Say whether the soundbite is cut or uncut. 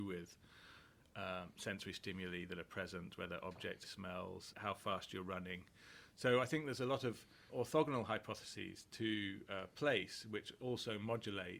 cut